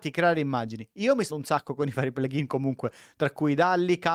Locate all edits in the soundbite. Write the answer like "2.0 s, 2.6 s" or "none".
1.3 s